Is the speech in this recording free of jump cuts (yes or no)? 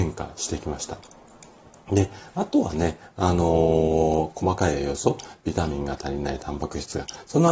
yes